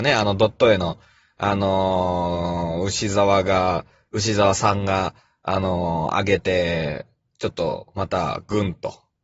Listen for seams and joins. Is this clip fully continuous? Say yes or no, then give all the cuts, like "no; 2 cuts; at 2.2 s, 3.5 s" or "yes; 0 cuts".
yes; 0 cuts